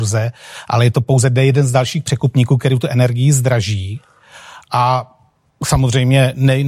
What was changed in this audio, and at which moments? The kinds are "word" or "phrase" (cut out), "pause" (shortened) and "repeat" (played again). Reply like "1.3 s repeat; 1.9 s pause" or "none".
none